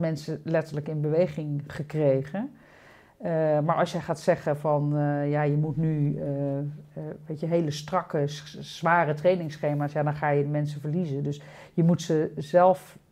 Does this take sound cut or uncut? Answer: uncut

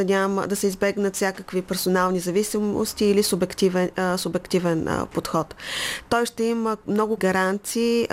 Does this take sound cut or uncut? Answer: cut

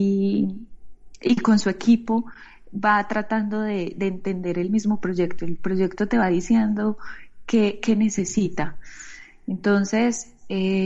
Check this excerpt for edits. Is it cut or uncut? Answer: uncut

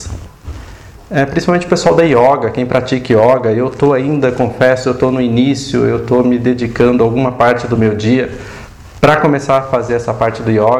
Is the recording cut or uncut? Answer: uncut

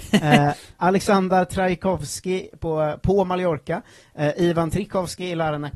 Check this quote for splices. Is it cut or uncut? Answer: uncut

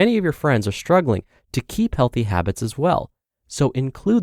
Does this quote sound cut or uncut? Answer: uncut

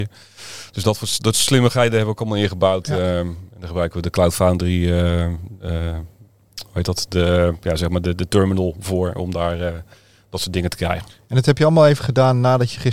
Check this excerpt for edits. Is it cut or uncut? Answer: uncut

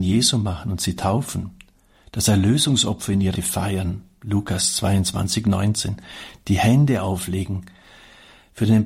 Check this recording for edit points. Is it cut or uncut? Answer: cut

